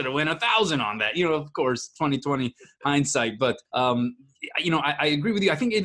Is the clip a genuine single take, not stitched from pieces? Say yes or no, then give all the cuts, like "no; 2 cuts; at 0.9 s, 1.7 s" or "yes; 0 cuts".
no; 1 cut; at 3.7 s